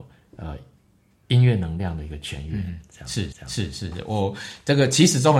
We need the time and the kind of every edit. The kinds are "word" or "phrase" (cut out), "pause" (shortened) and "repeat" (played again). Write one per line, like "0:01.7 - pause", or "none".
0:03.3 - repeat